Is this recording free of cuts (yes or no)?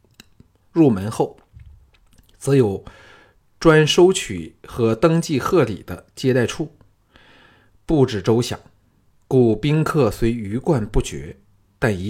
yes